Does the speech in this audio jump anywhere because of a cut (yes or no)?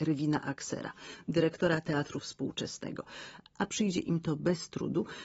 no